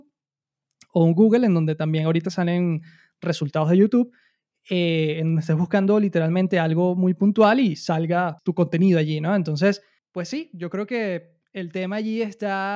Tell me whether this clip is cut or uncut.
uncut